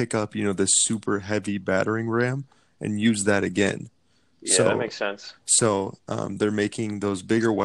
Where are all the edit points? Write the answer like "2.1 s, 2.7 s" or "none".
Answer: none